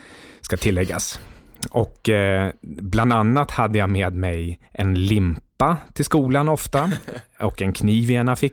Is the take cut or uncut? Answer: cut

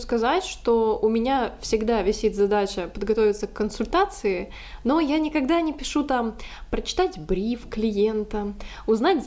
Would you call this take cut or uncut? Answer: uncut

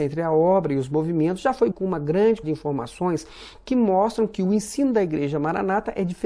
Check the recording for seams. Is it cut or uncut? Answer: cut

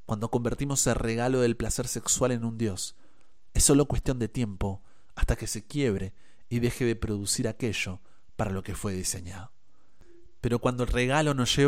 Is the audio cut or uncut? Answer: uncut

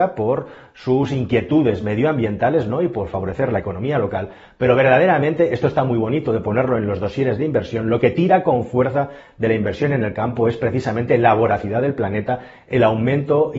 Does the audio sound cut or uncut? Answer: uncut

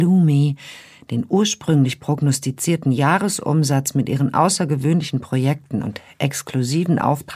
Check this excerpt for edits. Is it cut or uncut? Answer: uncut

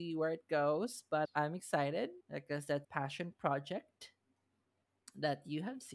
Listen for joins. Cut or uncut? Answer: cut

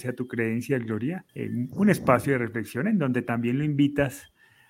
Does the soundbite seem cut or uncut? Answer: cut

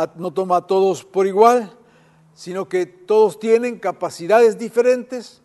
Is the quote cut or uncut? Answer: uncut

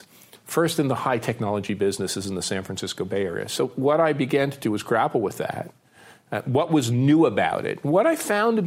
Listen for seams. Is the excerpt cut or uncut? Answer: uncut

